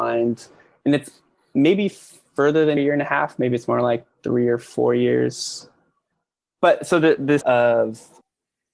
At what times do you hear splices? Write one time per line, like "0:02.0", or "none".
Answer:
0:02.8
0:07.4